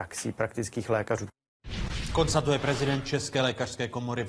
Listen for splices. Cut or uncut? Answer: uncut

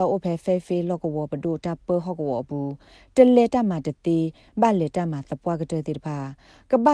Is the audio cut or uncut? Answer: uncut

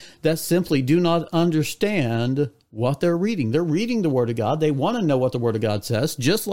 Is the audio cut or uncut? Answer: uncut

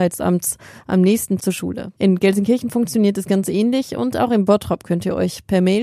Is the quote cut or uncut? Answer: cut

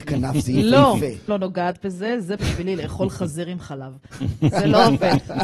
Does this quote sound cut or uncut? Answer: cut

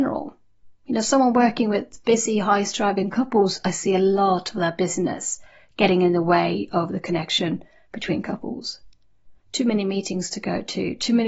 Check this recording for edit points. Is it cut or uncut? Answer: uncut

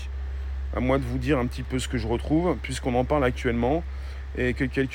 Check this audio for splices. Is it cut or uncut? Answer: uncut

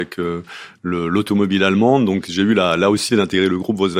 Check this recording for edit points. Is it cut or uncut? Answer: cut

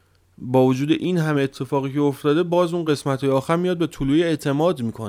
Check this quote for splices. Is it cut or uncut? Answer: uncut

